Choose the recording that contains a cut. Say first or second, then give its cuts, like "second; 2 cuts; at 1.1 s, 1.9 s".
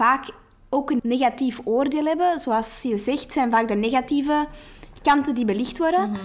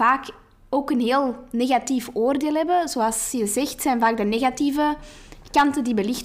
first; 1 cut; at 1.0 s